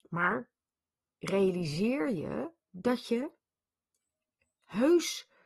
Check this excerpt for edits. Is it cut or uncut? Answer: cut